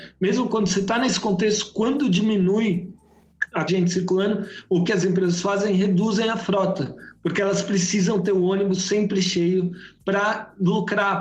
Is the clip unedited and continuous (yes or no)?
no